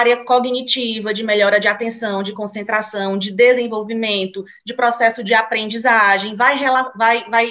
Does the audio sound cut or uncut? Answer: uncut